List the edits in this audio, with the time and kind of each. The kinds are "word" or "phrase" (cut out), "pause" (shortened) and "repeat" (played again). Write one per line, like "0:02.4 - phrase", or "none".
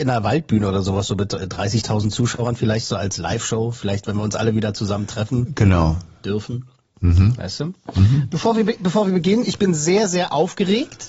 0:06.2 - pause